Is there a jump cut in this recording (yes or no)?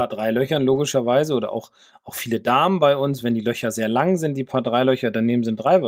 no